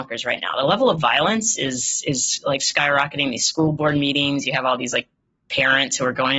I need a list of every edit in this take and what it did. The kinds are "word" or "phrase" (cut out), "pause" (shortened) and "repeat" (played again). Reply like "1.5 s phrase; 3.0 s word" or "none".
none